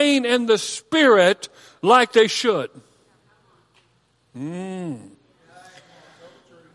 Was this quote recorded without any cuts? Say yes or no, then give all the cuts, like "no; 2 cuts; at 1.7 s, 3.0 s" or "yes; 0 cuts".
yes; 0 cuts